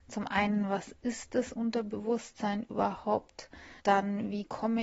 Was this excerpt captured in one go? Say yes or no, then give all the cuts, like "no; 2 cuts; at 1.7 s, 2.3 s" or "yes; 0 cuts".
no; 1 cut; at 3.8 s